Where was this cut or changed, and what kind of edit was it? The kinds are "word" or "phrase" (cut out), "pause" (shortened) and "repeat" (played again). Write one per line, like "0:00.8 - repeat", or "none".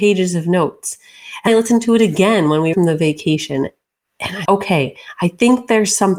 0:01.5 - word
0:02.7 - word
0:04.4 - word